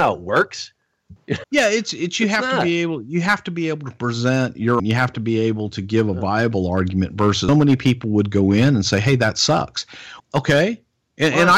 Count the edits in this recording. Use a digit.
4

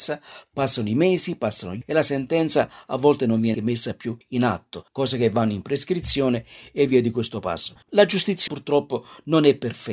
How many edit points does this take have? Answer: 6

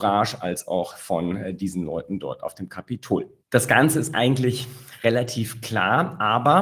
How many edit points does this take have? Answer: 1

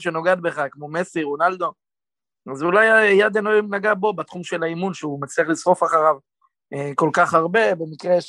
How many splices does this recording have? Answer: 0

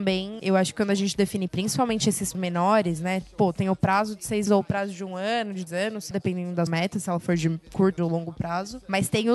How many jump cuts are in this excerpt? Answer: 7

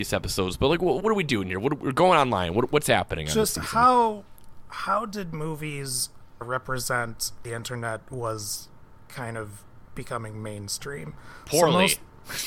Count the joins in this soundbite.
3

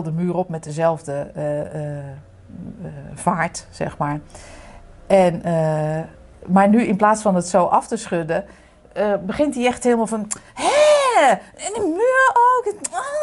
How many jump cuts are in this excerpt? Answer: 0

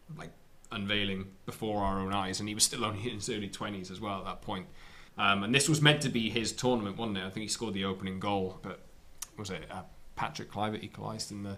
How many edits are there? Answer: 2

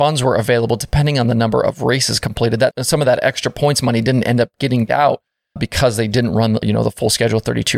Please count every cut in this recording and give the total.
4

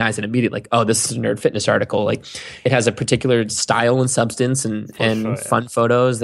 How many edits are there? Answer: 0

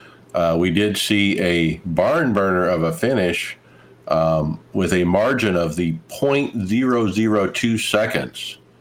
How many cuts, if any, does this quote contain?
0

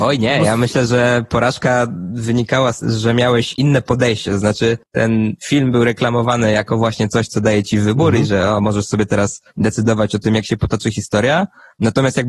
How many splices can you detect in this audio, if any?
2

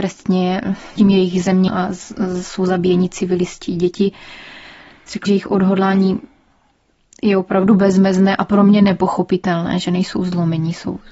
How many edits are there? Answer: 3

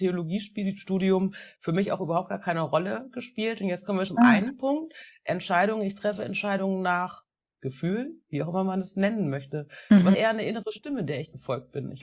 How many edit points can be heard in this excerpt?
3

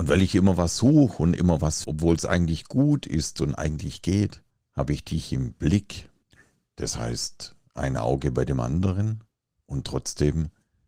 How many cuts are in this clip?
3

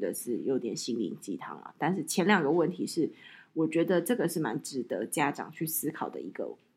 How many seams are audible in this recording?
0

